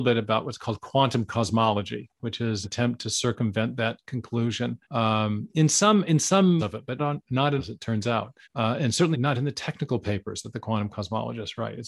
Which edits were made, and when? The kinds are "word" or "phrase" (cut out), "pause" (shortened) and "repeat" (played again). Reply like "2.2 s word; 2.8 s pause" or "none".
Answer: 2.6 s word; 4.8 s pause; 6.6 s word; 7.0 s word; 7.6 s word; 8.4 s pause; 9.1 s word

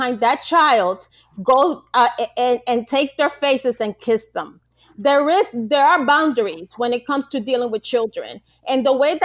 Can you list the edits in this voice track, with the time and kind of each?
none

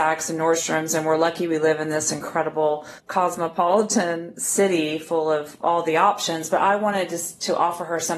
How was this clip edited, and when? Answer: 3.0 s pause

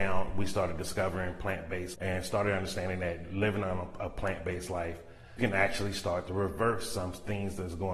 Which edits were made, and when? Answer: 1.9 s word; 5.4 s word

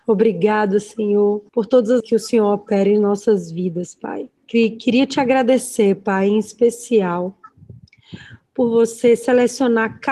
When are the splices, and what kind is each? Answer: 1.5 s pause; 2.0 s word; 4.4 s pause

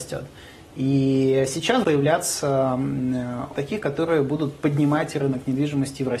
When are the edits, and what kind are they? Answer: 1.8 s word; 3.5 s phrase

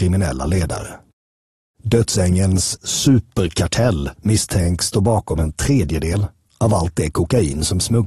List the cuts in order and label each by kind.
4.2 s pause

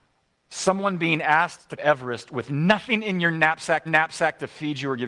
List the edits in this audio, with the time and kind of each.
1.8 s word; 3.9 s repeat

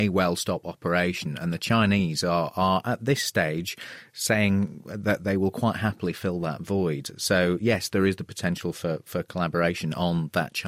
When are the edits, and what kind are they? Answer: none

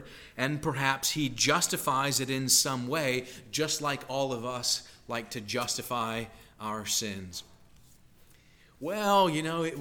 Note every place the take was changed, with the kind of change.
none

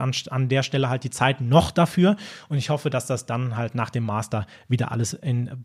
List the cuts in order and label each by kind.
none

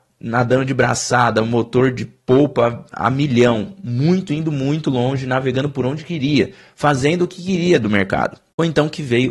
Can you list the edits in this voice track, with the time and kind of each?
none

